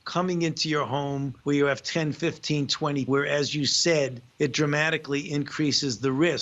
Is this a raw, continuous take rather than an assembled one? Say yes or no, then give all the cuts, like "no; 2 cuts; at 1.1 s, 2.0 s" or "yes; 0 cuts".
no; 3 cuts; at 1.4 s, 3.1 s, 4.3 s